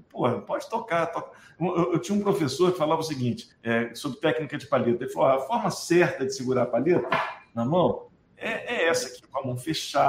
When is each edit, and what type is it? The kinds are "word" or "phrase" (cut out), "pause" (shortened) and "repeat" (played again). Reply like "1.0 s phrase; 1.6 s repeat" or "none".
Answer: 3.5 s pause